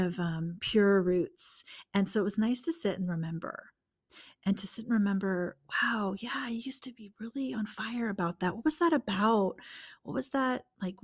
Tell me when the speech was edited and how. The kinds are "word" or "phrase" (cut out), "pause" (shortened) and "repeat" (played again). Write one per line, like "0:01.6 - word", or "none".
none

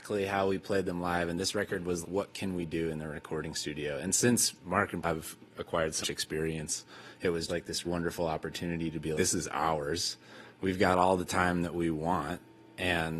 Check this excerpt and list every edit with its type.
0:02.0 - word
0:05.0 - word
0:06.0 - word
0:07.5 - word
0:07.8 - word
0:09.1 - word

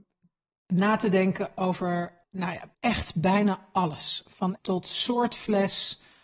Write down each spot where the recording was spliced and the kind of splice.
0:02.2 - pause
0:02.7 - pause
0:04.6 - word

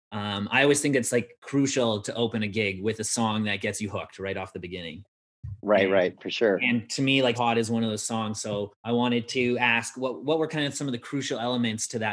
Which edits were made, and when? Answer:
0:07.3 - word
0:08.8 - pause

